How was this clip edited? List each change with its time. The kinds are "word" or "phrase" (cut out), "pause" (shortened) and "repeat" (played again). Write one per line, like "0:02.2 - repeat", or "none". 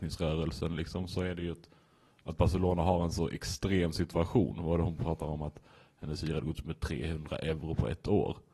none